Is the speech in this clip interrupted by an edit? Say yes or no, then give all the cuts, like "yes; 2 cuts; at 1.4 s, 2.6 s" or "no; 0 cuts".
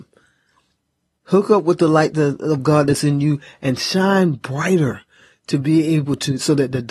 no; 0 cuts